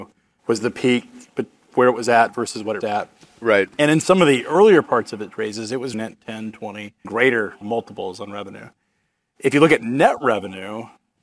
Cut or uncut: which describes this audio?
cut